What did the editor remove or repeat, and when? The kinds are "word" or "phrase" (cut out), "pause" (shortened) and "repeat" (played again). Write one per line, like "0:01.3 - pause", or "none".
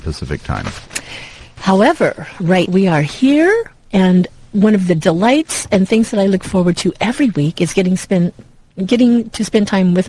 0:02.7 - word

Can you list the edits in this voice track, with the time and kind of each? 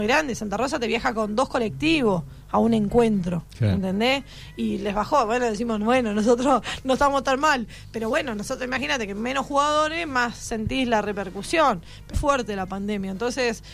0:12.1 - word

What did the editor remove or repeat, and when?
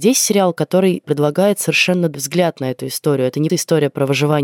0:01.0 - word
0:02.1 - word
0:03.5 - word

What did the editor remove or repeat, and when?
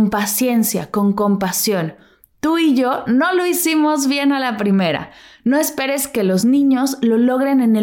none

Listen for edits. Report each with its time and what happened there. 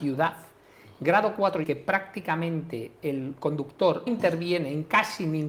0:01.6 - phrase
0:04.1 - word

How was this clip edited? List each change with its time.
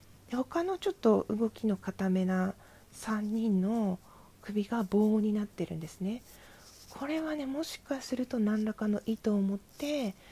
none

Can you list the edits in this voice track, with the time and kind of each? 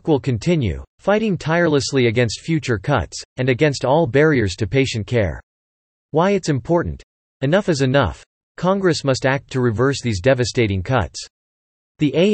none

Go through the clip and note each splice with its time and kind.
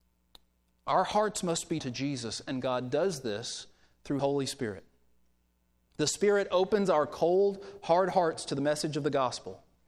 0:01.8 - word
0:04.2 - word

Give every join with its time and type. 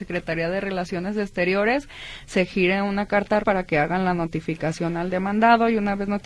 0:03.4 - word

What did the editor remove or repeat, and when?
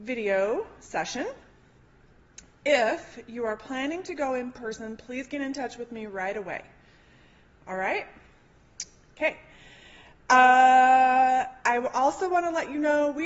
none

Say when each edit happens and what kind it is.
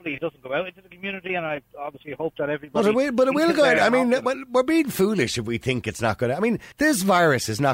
0:06.7 - pause

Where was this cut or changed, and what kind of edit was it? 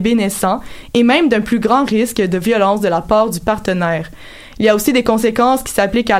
none

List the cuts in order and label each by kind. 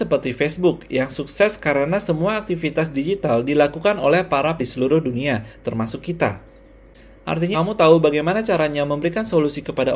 0:04.6 - word
0:07.5 - word

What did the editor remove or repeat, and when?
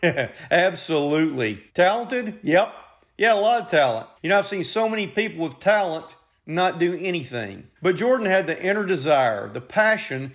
0:01.7 - pause
0:04.2 - pause
0:07.8 - pause

